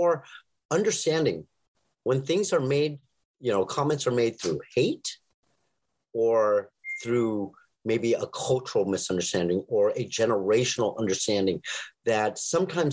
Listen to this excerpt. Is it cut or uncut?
uncut